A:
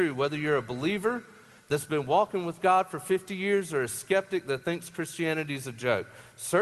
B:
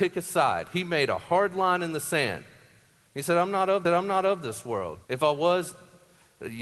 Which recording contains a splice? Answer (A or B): B